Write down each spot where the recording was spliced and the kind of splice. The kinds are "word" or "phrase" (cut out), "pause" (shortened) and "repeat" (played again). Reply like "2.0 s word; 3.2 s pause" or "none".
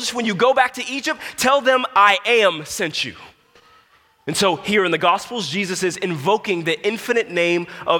none